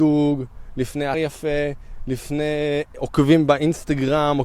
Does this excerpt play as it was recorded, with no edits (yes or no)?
no